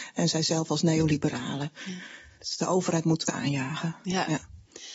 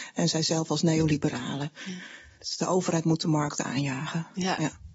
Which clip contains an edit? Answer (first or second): first